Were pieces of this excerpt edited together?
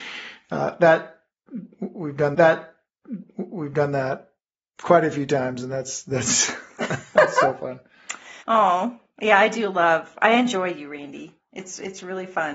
yes; 2 cuts; at 2.3 s, 8.4 s

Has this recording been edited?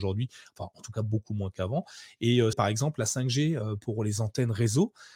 yes; 1 cut; at 2.5 s

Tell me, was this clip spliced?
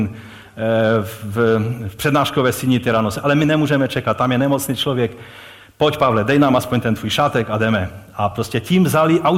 no; 0 cuts

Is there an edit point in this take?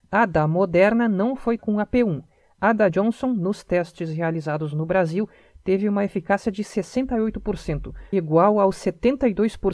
yes; 3 cuts; at 1.6 s, 2.9 s, 8.1 s

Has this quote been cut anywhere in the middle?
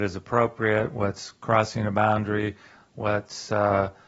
no; 0 cuts

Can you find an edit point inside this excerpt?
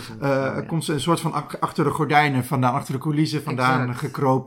no; 0 cuts

